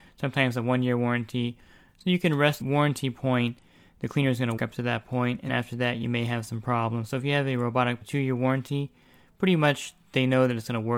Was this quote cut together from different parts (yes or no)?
yes